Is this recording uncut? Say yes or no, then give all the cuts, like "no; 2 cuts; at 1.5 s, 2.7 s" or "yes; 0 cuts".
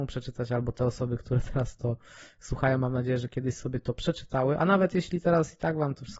yes; 0 cuts